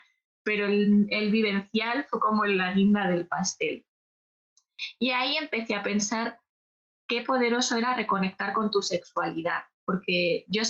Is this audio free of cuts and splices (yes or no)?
yes